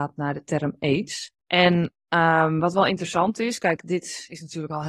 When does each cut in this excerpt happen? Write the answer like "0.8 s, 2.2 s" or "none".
1.4 s